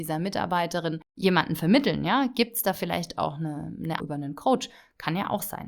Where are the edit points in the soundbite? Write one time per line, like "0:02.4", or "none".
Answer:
0:01.1
0:04.0